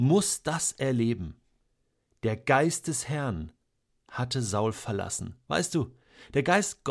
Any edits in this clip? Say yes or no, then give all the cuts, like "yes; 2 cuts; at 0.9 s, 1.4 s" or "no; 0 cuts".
no; 0 cuts